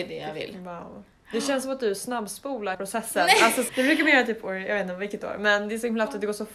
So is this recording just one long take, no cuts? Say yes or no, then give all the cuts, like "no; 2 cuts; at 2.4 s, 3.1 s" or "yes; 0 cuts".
no; 2 cuts; at 2.7 s, 3.7 s